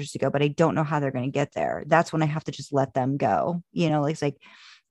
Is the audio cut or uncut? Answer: uncut